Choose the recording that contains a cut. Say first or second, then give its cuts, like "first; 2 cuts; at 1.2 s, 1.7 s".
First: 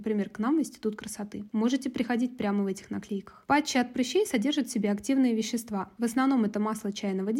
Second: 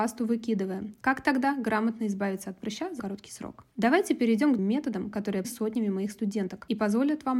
second; 3 cuts; at 3.0 s, 4.6 s, 5.4 s